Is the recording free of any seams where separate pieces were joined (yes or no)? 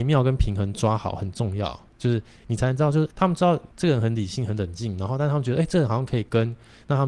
no